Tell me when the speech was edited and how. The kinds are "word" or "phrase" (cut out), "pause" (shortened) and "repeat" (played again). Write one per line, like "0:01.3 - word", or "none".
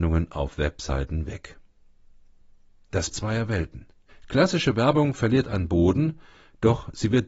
0:03.1 - word
0:04.1 - pause